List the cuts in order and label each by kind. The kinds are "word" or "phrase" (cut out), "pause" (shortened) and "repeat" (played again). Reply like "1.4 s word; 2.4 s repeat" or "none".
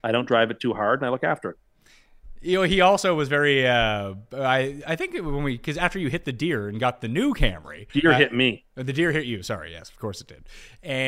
7.9 s pause